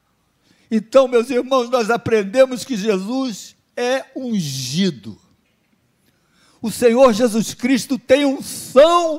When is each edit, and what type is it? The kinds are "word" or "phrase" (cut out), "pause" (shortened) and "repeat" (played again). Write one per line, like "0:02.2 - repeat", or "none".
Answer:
none